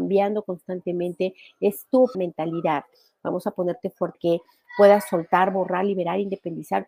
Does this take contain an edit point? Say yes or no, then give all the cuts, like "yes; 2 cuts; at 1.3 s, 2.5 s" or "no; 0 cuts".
yes; 2 cuts; at 2.1 s, 4.1 s